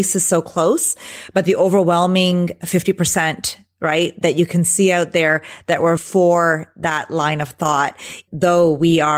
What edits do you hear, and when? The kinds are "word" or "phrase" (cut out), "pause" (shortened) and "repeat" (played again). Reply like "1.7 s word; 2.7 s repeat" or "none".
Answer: 4.2 s word; 6.0 s word; 8.3 s word